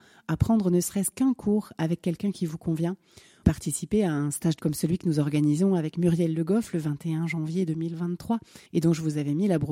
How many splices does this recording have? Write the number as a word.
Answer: three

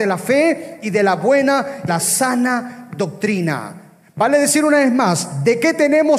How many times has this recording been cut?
one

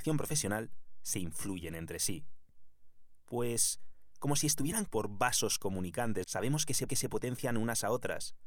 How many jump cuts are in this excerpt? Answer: three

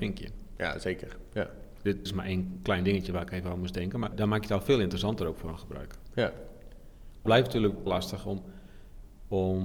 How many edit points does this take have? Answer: four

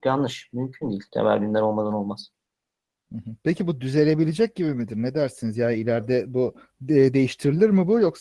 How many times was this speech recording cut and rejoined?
two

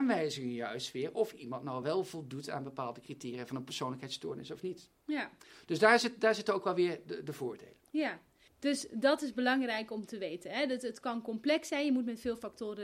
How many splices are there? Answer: zero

